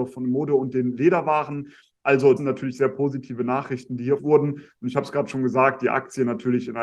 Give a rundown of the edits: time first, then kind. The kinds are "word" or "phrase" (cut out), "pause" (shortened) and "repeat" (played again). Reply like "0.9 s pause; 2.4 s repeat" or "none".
2.4 s word; 4.2 s word